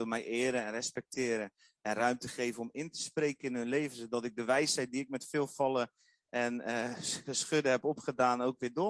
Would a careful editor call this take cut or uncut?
uncut